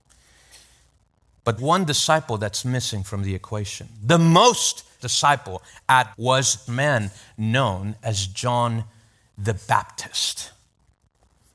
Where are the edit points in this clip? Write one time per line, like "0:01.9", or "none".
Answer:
0:01.6
0:05.0
0:06.1
0:06.7